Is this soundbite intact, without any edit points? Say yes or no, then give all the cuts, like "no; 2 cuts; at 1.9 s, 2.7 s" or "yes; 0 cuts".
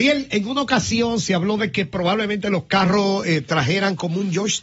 yes; 0 cuts